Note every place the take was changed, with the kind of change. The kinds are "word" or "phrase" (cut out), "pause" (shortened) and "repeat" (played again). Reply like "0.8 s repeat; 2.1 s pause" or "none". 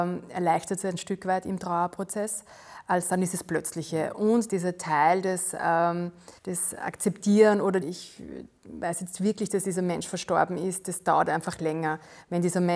4.5 s word; 6.4 s pause; 7.8 s phrase